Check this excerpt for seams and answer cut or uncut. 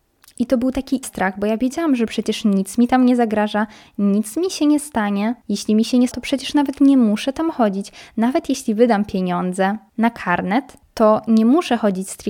cut